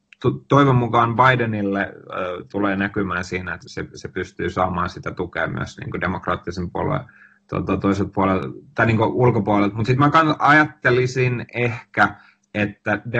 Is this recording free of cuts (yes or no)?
no